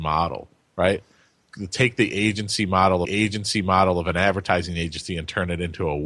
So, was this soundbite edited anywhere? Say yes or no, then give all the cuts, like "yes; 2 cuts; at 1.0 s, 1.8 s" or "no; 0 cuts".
yes; 1 cut; at 3.0 s